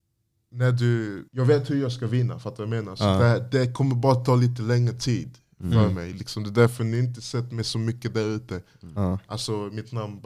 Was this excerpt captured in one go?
no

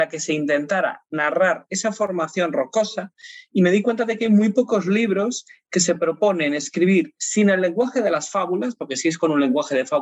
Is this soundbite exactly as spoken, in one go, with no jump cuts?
yes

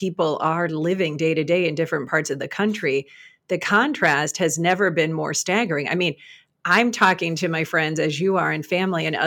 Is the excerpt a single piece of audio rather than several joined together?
yes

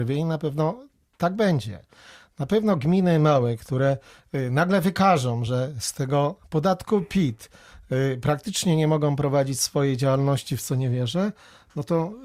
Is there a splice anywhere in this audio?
no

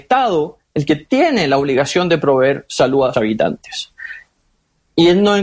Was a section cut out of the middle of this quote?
yes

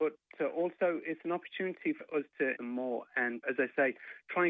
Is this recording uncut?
no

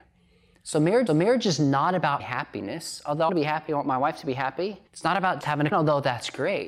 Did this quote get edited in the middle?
yes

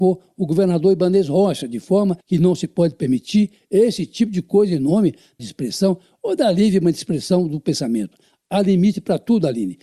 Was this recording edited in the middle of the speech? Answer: yes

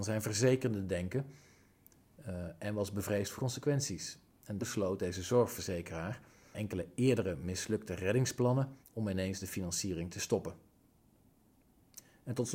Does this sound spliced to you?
yes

